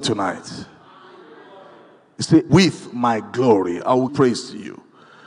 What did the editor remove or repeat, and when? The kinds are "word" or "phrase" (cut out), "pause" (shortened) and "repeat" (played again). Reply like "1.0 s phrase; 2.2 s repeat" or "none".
2.5 s word; 4.1 s word